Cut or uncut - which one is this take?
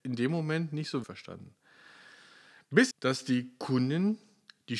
cut